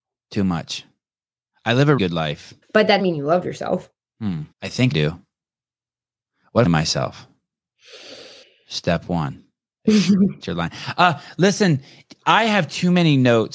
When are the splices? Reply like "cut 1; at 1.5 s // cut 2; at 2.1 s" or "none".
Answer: cut 1; at 2.0 s // cut 2; at 2.6 s // cut 3; at 3.0 s // cut 4; at 4.5 s // cut 5; at 4.9 s // cut 6; at 6.6 s // cut 7; at 8.4 s // cut 8; at 10.4 s